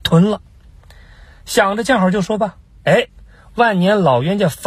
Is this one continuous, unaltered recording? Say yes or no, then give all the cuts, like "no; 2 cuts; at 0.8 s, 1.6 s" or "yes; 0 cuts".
yes; 0 cuts